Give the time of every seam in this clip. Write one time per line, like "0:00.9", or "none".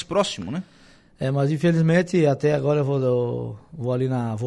none